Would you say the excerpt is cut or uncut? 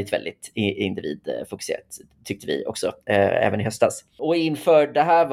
uncut